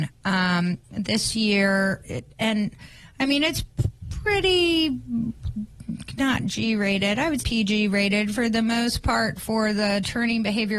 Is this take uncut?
no; 2 cuts; at 2.0 s, 7.4 s

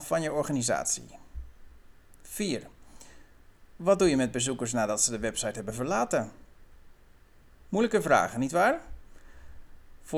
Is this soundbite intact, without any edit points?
yes; 0 cuts

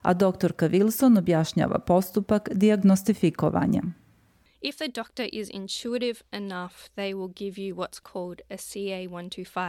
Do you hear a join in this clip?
no; 0 cuts

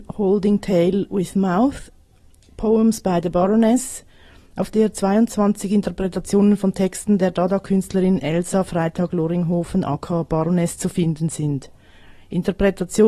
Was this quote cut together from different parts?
no; 0 cuts

